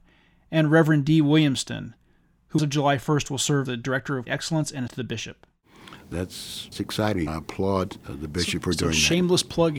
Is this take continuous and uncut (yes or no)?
no